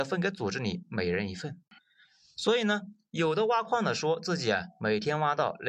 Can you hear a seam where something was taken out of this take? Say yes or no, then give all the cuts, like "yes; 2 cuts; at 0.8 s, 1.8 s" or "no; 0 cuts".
no; 0 cuts